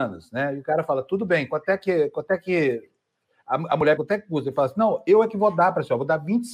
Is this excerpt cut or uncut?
cut